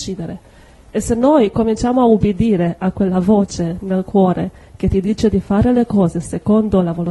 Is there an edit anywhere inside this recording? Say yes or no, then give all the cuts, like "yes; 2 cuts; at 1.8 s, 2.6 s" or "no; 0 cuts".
no; 0 cuts